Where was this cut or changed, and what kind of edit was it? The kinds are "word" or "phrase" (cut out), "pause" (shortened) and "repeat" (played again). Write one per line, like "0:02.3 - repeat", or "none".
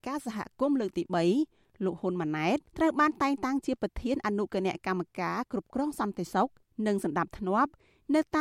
0:02.7 - pause